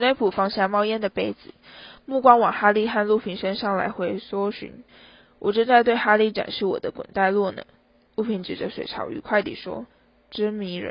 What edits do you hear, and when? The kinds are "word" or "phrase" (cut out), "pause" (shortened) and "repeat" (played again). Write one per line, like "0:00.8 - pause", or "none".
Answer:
0:04.9 - pause
0:09.9 - pause